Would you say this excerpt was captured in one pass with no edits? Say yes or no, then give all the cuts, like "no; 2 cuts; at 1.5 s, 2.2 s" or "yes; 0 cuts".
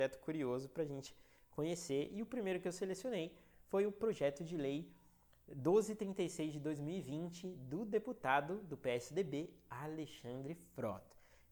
yes; 0 cuts